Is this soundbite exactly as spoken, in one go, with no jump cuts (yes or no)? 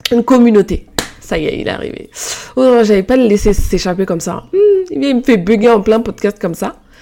yes